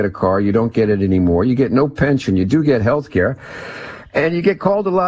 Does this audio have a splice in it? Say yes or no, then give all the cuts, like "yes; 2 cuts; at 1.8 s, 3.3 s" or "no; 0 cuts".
no; 0 cuts